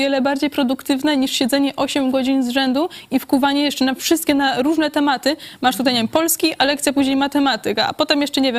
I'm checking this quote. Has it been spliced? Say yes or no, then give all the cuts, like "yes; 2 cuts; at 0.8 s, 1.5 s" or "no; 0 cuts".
no; 0 cuts